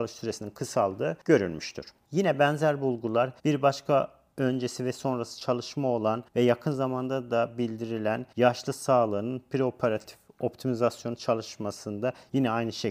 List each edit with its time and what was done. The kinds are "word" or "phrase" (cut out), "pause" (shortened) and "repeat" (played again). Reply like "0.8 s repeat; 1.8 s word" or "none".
3.4 s pause; 6.3 s pause; 8.3 s pause